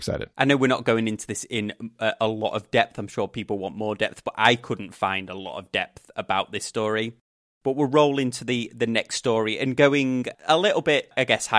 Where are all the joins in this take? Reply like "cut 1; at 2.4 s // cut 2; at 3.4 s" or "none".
none

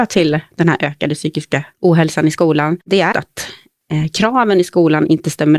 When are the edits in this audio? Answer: cut 1; at 1.7 s // cut 2; at 2.8 s // cut 3; at 3.1 s

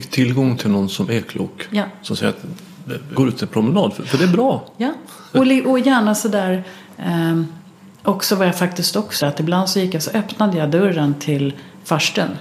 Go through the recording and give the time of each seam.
cut 1; at 3.2 s // cut 2; at 5.3 s // cut 3; at 5.6 s // cut 4; at 9.2 s

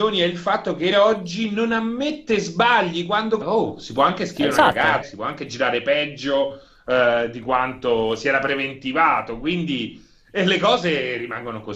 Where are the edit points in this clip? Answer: cut 1; at 0.9 s // cut 2; at 3.4 s // cut 3; at 5.0 s

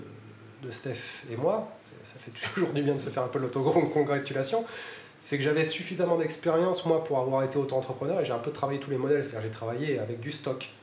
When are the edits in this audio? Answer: none

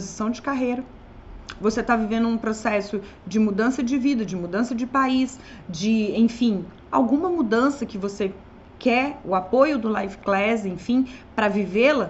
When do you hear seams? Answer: none

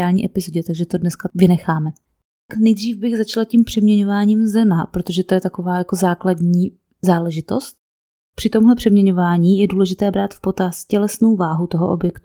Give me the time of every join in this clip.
none

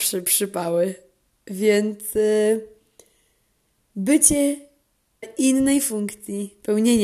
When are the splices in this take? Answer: cut 1; at 5.2 s

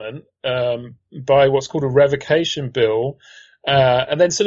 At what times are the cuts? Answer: none

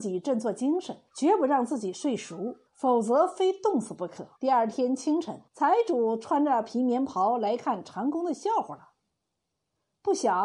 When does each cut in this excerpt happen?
cut 1; at 1.1 s // cut 2; at 2.7 s // cut 3; at 4.4 s // cut 4; at 5.5 s

